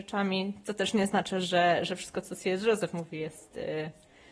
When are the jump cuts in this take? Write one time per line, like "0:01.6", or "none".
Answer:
none